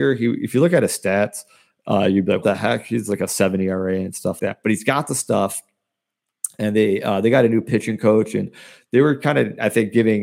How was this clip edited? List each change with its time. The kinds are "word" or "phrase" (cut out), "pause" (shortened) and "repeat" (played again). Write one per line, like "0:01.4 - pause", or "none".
0:02.4 - word
0:04.4 - word